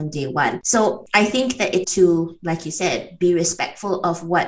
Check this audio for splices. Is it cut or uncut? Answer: cut